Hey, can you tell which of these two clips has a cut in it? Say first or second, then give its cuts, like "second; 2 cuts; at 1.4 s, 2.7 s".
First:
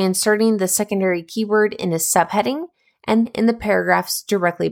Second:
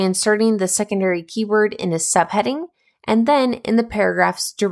first; 1 cut; at 3.3 s